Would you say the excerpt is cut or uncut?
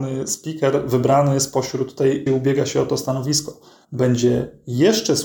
cut